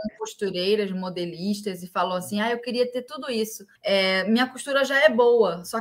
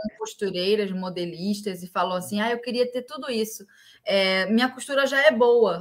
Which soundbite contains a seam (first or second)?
first